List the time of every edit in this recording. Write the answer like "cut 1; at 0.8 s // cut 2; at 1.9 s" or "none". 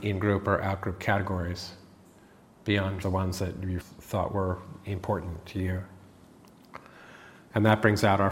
cut 1; at 3.0 s // cut 2; at 3.8 s